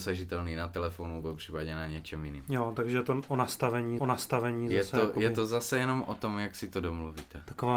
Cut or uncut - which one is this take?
cut